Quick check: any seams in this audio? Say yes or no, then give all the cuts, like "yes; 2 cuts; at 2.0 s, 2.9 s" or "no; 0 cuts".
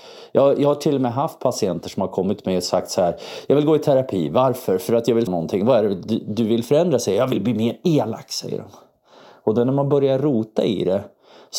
yes; 1 cut; at 5.3 s